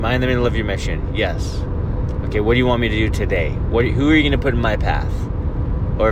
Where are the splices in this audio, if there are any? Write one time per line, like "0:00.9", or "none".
none